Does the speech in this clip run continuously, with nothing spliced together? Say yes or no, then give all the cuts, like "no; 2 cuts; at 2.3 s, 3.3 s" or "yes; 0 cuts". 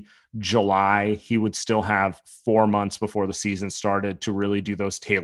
yes; 0 cuts